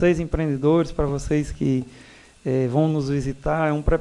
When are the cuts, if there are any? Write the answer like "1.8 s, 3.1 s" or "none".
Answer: none